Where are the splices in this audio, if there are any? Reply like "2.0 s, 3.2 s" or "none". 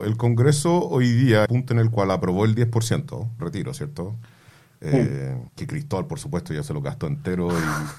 1.5 s, 3.4 s, 5.5 s